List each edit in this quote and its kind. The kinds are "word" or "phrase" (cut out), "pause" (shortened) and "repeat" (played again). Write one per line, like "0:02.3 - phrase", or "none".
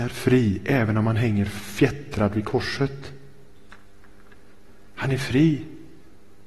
none